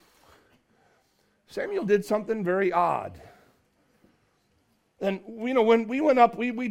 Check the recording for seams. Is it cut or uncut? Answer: uncut